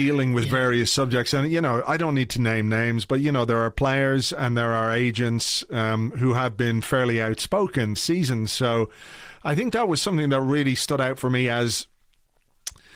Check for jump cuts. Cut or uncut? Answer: cut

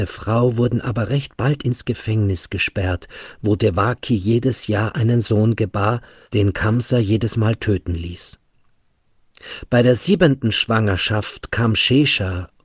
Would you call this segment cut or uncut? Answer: uncut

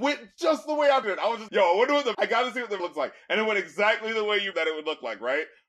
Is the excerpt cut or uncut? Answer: cut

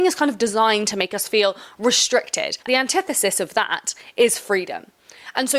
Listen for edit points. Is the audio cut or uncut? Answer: cut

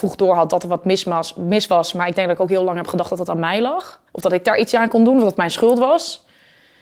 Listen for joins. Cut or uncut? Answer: cut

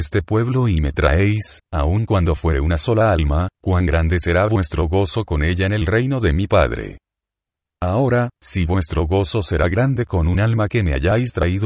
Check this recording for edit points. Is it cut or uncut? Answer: uncut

